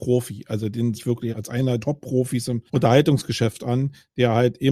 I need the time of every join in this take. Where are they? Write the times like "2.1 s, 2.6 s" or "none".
1.0 s, 1.3 s, 1.8 s, 2.7 s